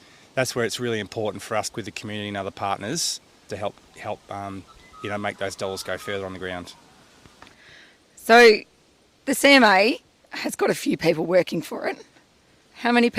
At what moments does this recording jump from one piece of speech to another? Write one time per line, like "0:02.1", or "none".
0:01.7
0:03.5

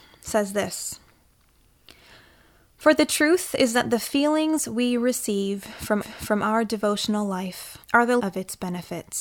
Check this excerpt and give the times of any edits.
0:06.0
0:07.8
0:08.2

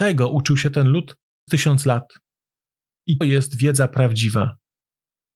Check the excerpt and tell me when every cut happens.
0:01.5
0:03.2

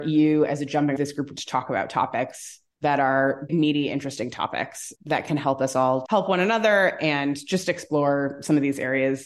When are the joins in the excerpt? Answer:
0:01.0
0:01.4
0:02.7
0:03.5
0:05.0
0:06.1

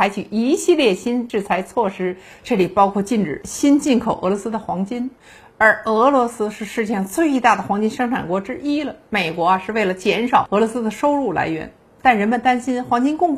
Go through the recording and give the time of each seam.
none

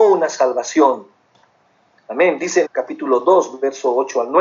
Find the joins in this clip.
0:02.6

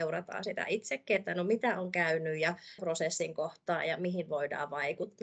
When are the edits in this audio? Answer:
0:02.8

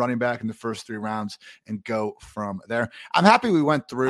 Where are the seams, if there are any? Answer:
none

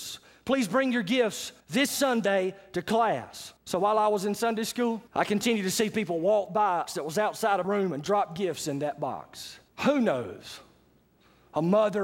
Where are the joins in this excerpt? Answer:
0:01.6
0:03.6
0:05.1
0:06.9
0:07.6
0:09.7

